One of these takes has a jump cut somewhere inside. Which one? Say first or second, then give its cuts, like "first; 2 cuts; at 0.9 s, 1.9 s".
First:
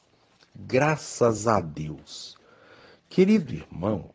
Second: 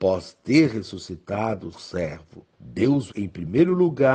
second; 3 cuts; at 1.7 s, 2.5 s, 3.1 s